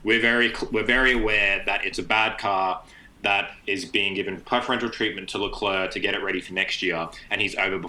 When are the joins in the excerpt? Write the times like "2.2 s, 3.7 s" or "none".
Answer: none